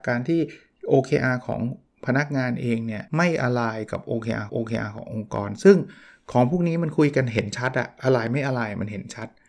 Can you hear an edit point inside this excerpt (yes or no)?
yes